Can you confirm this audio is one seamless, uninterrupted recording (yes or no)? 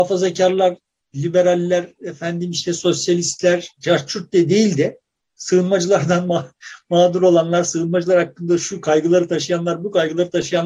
yes